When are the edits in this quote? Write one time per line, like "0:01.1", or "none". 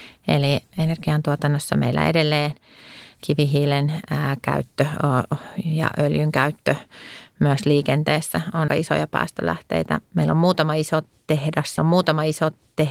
0:08.7
0:11.8